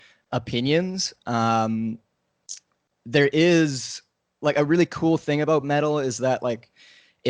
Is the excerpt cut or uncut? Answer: uncut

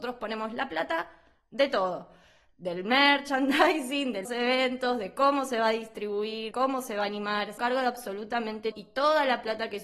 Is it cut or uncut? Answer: cut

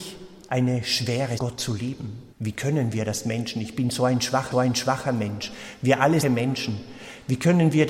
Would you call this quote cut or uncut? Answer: cut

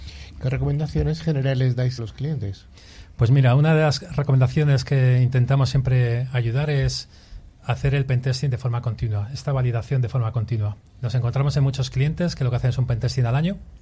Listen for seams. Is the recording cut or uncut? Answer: cut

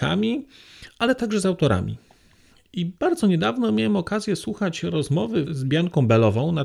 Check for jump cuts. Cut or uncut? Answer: cut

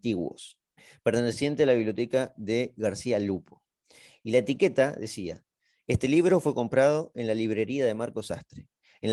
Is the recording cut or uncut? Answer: uncut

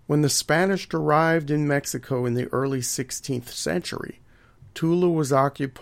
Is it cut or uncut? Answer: uncut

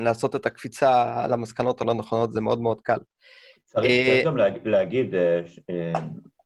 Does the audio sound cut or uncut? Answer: uncut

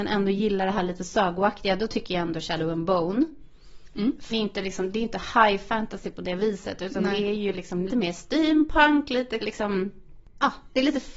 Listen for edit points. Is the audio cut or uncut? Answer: cut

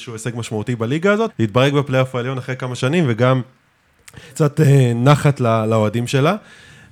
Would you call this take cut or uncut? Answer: cut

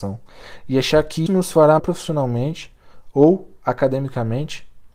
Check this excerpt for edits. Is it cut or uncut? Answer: cut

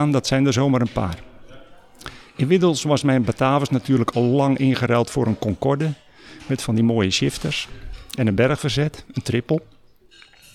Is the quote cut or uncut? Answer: uncut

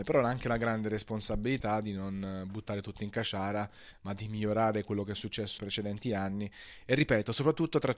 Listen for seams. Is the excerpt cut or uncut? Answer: cut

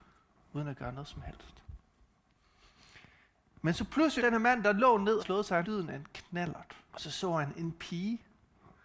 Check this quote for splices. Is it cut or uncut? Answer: cut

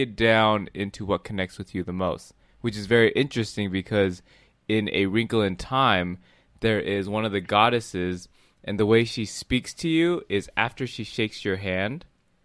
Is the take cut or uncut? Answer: uncut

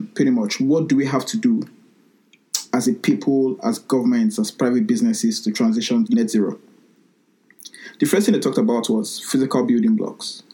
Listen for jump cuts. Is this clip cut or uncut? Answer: cut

